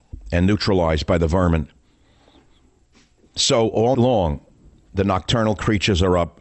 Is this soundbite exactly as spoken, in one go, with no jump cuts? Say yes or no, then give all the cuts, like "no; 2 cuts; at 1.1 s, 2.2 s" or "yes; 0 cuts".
no; 1 cut; at 3.9 s